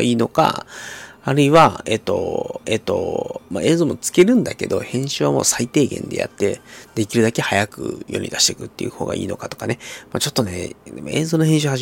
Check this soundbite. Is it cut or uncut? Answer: cut